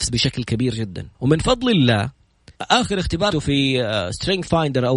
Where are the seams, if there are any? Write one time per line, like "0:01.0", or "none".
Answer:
0:01.1
0:02.5
0:03.3

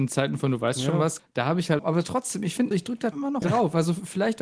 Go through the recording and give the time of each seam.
0:01.2
0:01.8
0:02.7
0:03.1
0:03.4

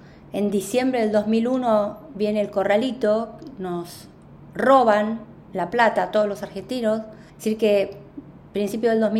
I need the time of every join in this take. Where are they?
0:07.3

